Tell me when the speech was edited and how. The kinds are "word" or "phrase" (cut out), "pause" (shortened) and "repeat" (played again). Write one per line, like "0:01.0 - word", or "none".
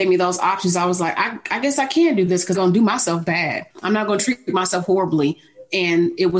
0:02.5 - phrase
0:03.7 - pause